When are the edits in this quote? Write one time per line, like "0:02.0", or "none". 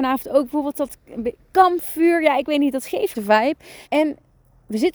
0:03.1
0:03.8